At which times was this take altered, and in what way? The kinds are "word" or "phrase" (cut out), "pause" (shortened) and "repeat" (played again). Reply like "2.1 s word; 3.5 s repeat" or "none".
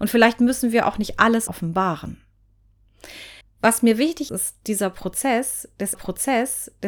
1.5 s word; 3.4 s pause; 4.3 s word; 5.9 s repeat